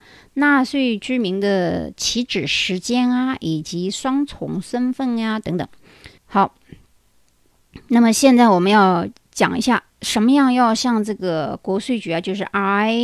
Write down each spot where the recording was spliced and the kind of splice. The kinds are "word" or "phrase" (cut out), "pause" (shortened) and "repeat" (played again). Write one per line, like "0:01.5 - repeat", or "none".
0:06.2 - pause
0:09.9 - pause